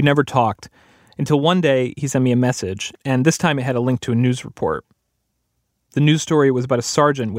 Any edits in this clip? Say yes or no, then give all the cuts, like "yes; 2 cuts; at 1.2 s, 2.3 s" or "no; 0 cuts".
no; 0 cuts